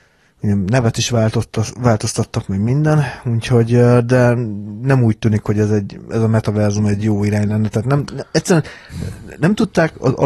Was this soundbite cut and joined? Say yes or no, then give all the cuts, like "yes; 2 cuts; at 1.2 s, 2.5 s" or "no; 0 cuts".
no; 0 cuts